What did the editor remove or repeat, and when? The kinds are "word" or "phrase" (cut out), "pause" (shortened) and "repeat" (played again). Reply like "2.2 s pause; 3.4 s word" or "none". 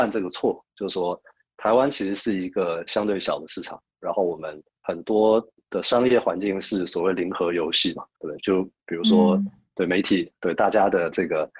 none